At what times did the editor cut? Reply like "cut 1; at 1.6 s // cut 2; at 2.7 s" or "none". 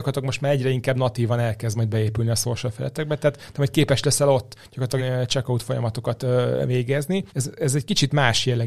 cut 1; at 5.0 s // cut 2; at 7.3 s